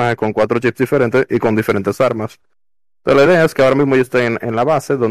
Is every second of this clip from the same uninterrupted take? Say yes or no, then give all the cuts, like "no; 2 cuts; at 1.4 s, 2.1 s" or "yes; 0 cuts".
yes; 0 cuts